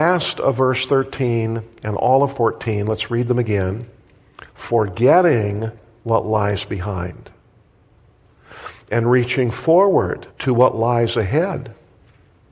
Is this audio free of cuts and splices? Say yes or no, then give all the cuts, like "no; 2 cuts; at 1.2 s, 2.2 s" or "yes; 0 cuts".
no; 2 cuts; at 4.5 s, 10.3 s